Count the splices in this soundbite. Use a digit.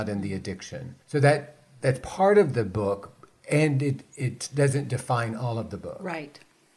1